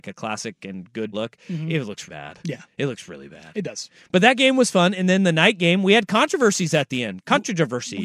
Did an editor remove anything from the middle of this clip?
yes; 2 cuts; at 1.1 s, 2.1 s

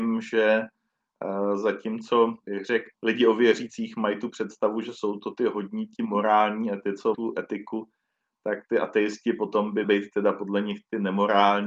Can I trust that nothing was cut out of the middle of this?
no; 4 cuts; at 2.4 s, 2.9 s, 7.1 s, 9.8 s

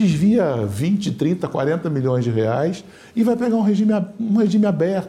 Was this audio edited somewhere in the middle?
no; 0 cuts

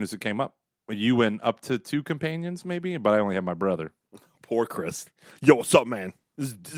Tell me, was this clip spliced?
no; 0 cuts

